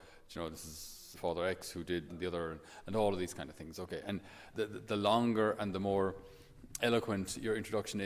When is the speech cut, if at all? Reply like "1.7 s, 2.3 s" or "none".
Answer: 1.1 s, 2.1 s, 4.5 s, 6.8 s